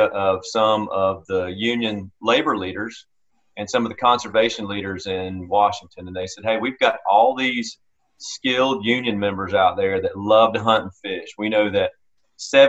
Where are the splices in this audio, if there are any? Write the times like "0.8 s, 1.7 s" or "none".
none